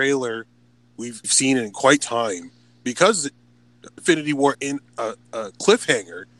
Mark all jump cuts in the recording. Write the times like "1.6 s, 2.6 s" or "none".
1.2 s, 2.0 s, 4.0 s, 4.5 s